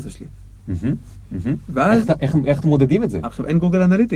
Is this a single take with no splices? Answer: yes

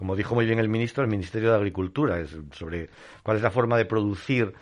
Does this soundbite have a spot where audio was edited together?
no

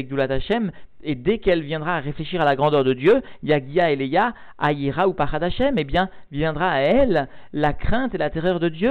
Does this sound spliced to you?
no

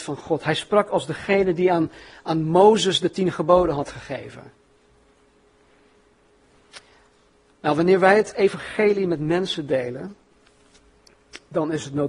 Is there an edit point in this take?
no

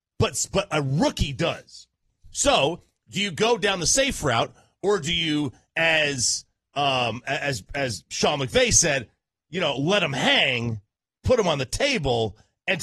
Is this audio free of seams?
yes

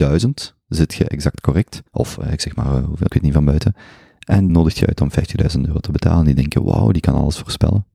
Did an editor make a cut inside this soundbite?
yes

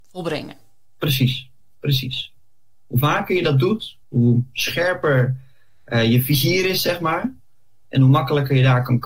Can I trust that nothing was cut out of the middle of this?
no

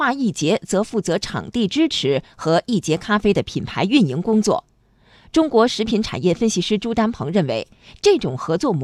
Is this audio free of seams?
yes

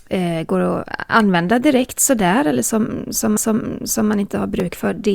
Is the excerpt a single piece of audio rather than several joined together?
no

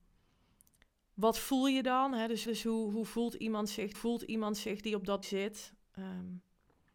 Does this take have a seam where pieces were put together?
yes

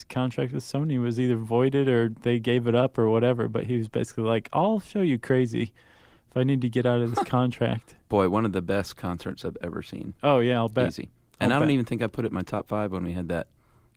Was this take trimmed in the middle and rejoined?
yes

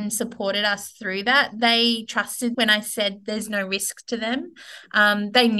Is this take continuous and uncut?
no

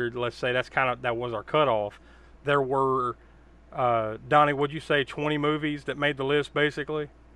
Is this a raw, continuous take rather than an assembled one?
yes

